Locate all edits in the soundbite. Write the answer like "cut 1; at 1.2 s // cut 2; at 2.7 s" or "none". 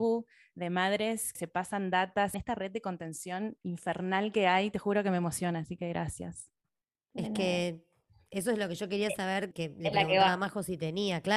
cut 1; at 1.3 s // cut 2; at 2.3 s // cut 3; at 9.5 s